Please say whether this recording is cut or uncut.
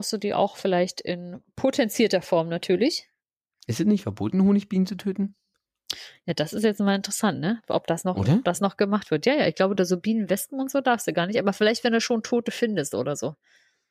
uncut